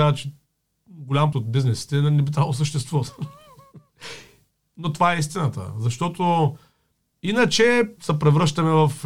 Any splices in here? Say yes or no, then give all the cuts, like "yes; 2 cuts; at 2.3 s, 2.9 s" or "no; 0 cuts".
yes; 2 cuts; at 1.3 s, 8.0 s